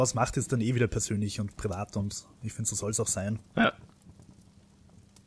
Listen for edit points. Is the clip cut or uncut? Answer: cut